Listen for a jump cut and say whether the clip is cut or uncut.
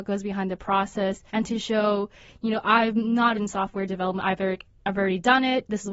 cut